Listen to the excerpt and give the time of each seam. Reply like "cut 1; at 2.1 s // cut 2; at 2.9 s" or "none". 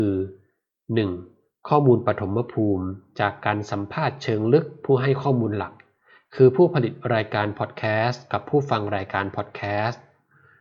none